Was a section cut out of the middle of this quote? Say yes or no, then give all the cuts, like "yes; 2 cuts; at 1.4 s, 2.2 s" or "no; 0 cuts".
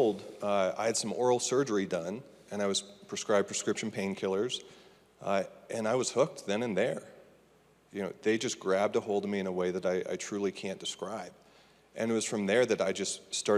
no; 0 cuts